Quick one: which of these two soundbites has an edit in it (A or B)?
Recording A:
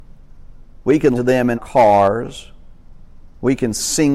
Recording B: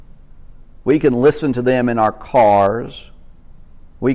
A